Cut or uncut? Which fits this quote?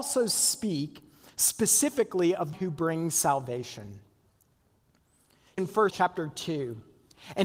cut